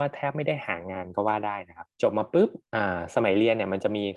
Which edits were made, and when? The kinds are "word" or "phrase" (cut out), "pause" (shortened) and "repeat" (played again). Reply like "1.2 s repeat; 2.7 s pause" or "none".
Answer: 1.9 s pause; 2.6 s pause